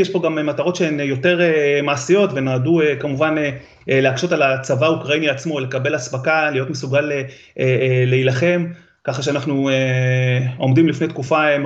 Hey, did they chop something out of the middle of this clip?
no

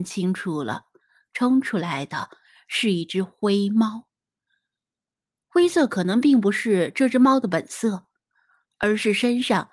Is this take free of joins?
yes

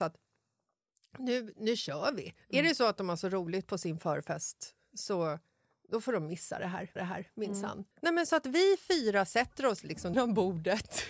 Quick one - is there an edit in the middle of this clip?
yes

